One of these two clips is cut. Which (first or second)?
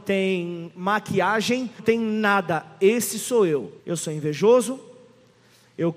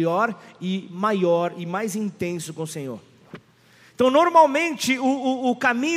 first